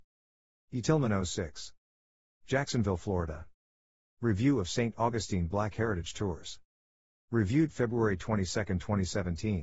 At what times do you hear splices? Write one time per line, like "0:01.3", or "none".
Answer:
none